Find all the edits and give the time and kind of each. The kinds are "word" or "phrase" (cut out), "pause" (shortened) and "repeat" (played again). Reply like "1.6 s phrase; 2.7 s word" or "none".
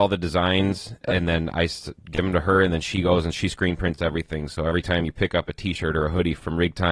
1.0 s word